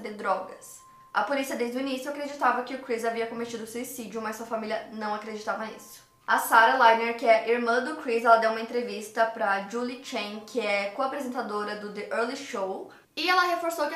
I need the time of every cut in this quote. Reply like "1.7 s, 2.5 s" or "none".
none